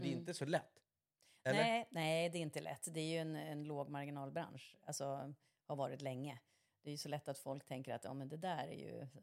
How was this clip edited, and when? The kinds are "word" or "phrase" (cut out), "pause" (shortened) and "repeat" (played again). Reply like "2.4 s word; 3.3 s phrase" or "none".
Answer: none